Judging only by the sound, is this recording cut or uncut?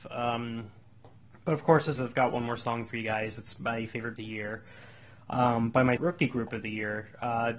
cut